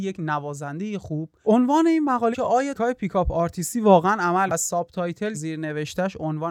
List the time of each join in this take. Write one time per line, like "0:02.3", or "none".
0:01.4
0:02.3
0:02.7
0:04.5
0:05.3